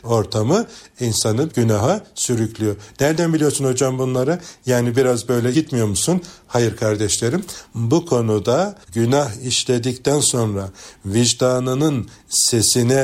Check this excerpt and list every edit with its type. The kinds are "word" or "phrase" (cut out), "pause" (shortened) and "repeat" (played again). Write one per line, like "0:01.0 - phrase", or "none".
0:01.5 - word
0:05.5 - word
0:08.8 - pause